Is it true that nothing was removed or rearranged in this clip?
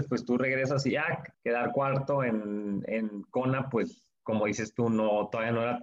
no; 1 cut; at 1.3 s

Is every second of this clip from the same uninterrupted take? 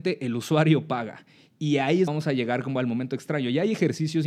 no; 1 cut; at 2.1 s

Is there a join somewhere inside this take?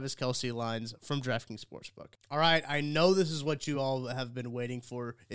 no; 0 cuts

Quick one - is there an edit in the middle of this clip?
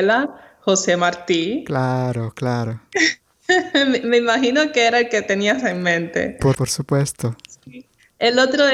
yes; 1 cut; at 6.5 s

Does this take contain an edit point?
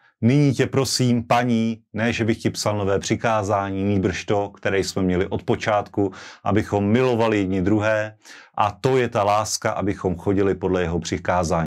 no; 0 cuts

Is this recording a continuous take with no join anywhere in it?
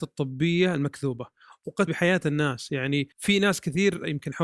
no; 2 cuts; at 1.9 s, 3.1 s

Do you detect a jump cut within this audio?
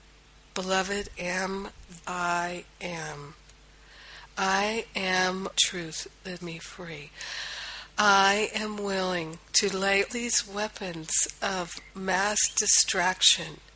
yes; 6 cuts; at 1.1 s, 2.0 s, 5.5 s, 6.4 s, 9.4 s, 10.1 s

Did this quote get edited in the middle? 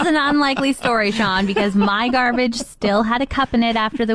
no; 0 cuts

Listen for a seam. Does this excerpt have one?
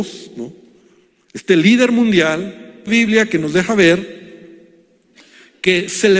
yes; 1 cut; at 2.9 s

